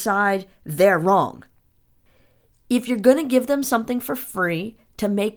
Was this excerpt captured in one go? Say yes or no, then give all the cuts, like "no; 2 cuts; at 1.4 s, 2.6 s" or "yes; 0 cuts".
yes; 0 cuts